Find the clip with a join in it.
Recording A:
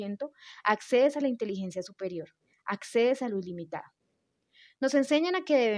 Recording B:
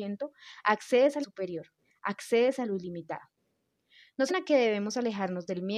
B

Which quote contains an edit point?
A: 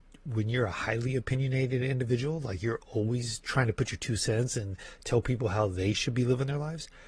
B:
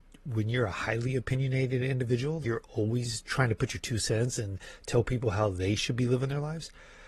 B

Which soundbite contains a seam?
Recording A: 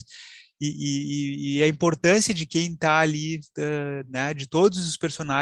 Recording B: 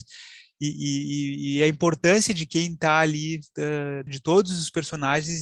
B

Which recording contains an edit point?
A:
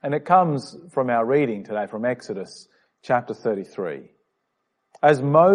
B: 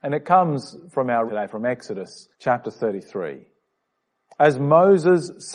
B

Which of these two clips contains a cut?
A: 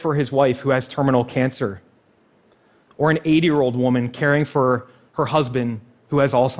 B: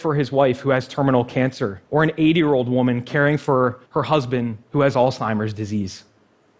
B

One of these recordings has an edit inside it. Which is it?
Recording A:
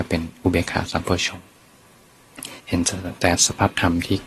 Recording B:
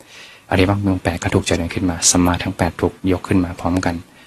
A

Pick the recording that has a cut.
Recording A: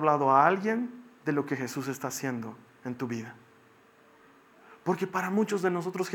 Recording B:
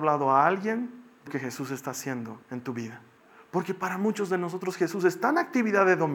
B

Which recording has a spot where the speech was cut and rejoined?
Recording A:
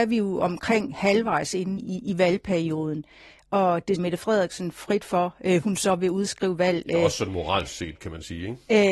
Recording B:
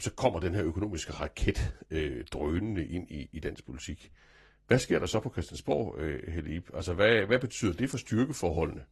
A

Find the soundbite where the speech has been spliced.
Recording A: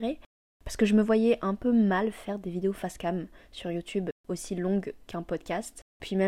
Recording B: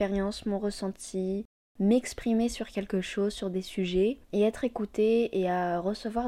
B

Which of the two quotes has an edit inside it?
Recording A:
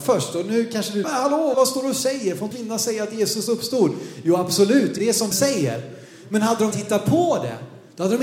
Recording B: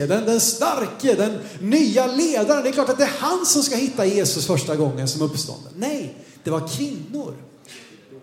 A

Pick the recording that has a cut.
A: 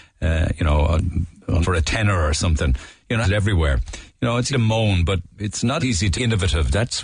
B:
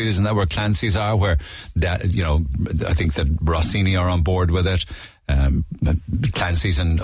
A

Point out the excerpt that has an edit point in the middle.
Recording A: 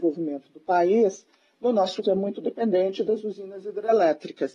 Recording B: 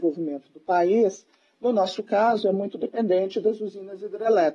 A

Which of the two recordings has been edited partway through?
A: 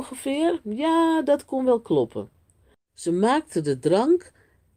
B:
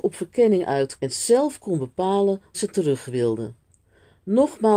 B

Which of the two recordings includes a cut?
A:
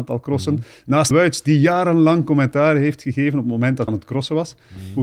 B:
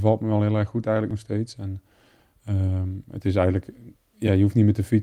A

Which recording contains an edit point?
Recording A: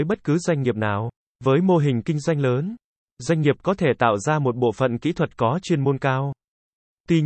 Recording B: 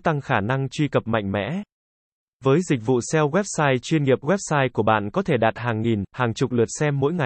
A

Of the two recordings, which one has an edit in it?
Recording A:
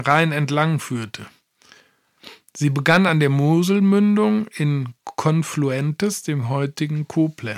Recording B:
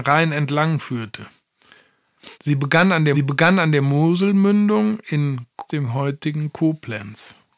B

